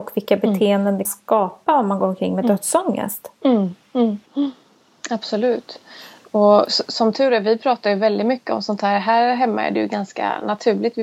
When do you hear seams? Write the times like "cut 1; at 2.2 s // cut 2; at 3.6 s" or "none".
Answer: cut 1; at 1.0 s // cut 2; at 4.3 s